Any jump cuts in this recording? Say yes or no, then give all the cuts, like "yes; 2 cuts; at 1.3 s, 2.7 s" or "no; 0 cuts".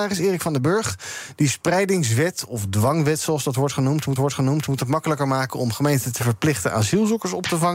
yes; 1 cut; at 4.2 s